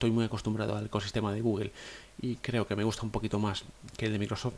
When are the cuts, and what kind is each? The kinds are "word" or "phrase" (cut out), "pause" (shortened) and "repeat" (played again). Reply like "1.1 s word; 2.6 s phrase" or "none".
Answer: none

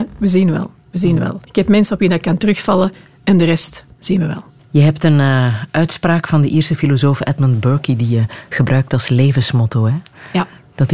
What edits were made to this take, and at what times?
1.4 s pause; 3.9 s pause; 4.6 s pause

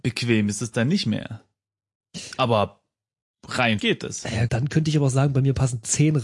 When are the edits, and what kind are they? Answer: 3.8 s word; 4.5 s word

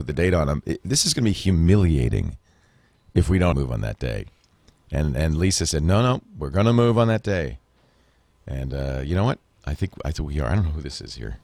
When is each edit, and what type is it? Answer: 3.5 s word

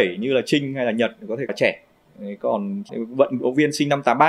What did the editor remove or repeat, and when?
1.5 s word; 2.0 s pause; 2.9 s word

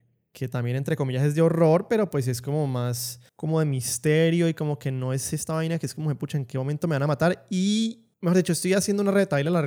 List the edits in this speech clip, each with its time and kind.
3.3 s pause; 8.1 s pause

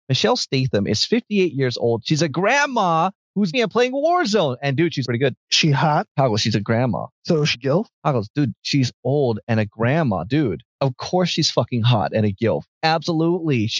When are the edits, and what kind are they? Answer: 3.5 s word; 5.0 s word; 6.1 s pause; 7.1 s pause; 7.5 s word; 7.9 s pause; 10.7 s pause

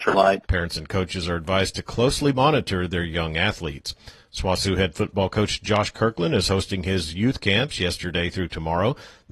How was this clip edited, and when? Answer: none

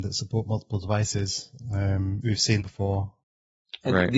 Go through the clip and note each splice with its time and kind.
2.2 s word; 2.6 s word

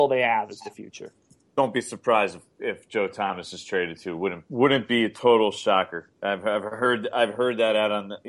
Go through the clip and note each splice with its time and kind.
none

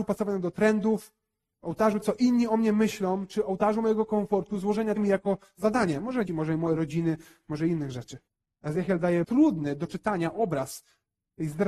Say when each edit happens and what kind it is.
2.0 s word; 5.0 s phrase; 6.3 s word; 8.3 s pause; 9.2 s phrase

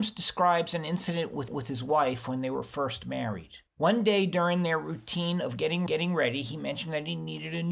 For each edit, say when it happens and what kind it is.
1.5 s repeat; 3.7 s pause; 5.9 s repeat

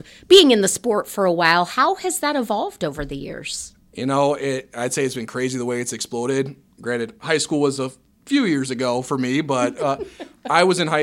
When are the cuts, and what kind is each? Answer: none

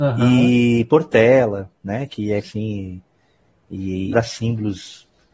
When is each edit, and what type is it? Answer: 2.4 s word; 4.1 s word

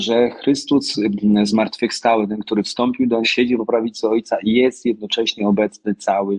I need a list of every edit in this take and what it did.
3.2 s word

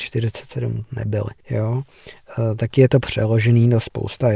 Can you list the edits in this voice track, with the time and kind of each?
1.4 s pause

